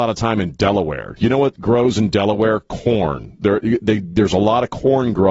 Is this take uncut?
yes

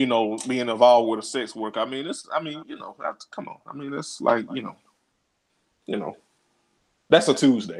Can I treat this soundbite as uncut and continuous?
yes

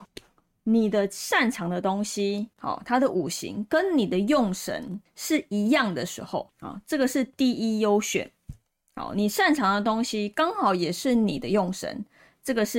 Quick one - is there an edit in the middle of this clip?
no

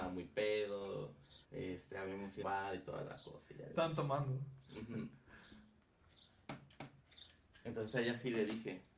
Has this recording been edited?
yes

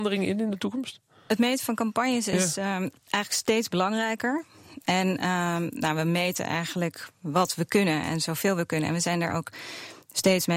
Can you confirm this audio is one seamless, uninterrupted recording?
yes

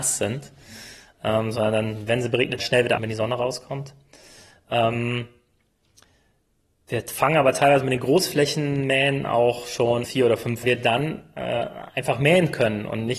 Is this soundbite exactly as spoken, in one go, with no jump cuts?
no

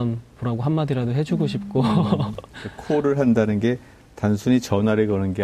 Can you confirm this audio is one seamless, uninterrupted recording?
yes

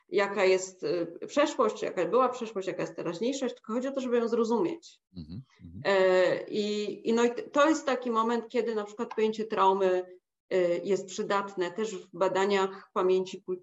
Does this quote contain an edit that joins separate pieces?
yes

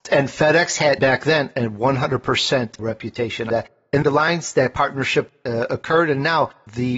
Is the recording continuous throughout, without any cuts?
no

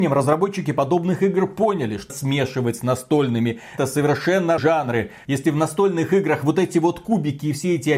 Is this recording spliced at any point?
yes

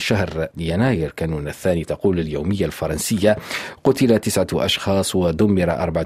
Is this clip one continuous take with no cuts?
yes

